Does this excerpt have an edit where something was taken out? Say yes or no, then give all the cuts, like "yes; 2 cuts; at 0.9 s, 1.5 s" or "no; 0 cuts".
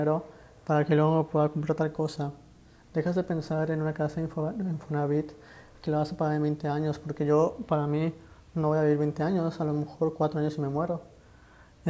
no; 0 cuts